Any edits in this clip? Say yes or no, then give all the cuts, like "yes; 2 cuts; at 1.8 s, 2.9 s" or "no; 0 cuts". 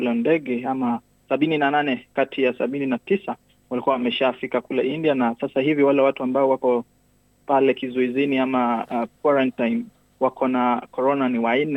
no; 0 cuts